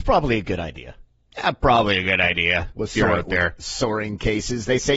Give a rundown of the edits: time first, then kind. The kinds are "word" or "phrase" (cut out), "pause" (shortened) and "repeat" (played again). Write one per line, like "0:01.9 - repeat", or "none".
none